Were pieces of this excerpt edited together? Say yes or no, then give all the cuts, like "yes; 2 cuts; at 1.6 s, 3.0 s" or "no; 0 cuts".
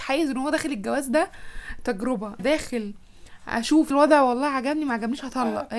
yes; 2 cuts; at 2.4 s, 3.9 s